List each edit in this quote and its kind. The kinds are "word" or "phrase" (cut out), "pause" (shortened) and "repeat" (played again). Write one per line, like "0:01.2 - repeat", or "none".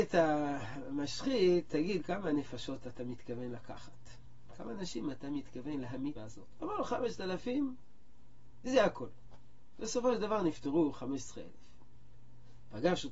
0:02.0 - word
0:06.1 - word